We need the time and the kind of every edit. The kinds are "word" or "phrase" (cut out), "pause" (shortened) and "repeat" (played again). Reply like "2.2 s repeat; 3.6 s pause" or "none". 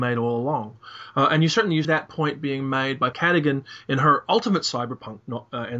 1.8 s word; 3.1 s word